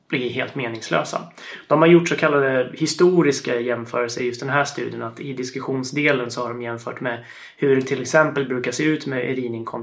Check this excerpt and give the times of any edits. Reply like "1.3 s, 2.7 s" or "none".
none